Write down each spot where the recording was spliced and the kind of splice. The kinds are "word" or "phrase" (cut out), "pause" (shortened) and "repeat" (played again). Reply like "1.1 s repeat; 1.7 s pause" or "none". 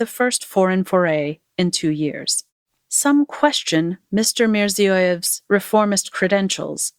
none